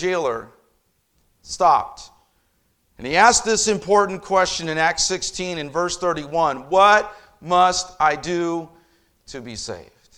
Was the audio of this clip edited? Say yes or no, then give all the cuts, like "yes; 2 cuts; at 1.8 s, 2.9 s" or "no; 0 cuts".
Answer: no; 0 cuts